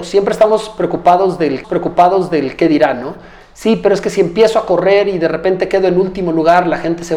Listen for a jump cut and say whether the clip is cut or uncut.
cut